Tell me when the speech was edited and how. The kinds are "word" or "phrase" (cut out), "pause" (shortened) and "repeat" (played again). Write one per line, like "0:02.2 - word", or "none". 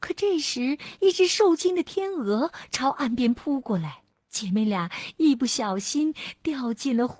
0:04.1 - pause